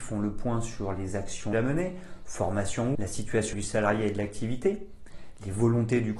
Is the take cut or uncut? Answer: cut